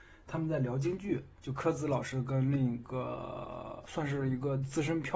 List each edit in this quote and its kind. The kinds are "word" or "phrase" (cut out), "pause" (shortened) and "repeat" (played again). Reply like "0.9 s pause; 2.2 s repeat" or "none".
1.4 s pause; 3.8 s word